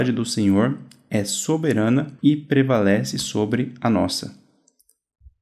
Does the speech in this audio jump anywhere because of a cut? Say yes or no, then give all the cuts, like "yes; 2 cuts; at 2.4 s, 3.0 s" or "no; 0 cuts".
yes; 1 cut; at 2.2 s